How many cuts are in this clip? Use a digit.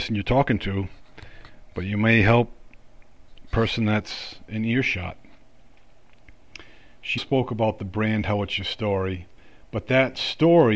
1